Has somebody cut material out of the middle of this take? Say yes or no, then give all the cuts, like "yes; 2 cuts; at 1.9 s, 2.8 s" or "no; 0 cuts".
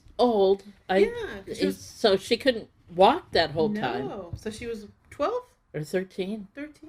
no; 0 cuts